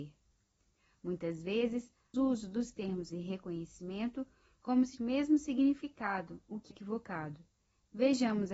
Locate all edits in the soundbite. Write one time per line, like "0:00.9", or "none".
0:02.1
0:03.1
0:05.0
0:06.7